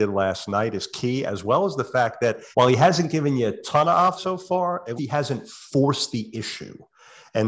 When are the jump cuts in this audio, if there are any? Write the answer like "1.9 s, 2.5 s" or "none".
2.5 s, 4.2 s, 5.0 s